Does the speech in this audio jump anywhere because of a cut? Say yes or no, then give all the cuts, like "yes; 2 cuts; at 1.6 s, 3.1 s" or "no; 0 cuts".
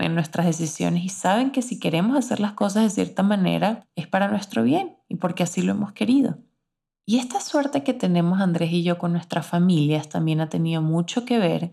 no; 0 cuts